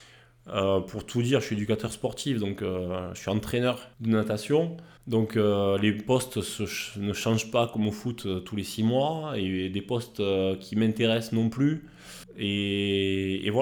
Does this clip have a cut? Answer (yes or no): yes